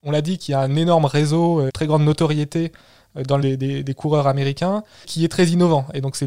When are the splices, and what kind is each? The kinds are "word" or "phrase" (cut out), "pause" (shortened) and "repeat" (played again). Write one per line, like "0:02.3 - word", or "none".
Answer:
0:01.7 - word
0:03.4 - word
0:05.0 - word